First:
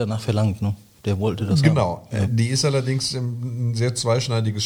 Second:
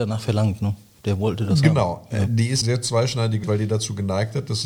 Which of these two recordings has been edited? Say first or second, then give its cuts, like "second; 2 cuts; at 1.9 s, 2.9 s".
second; 2 cuts; at 2.6 s, 3.4 s